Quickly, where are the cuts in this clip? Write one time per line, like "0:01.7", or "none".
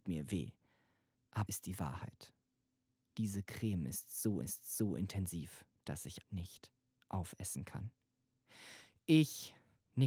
0:01.5
0:04.4
0:06.2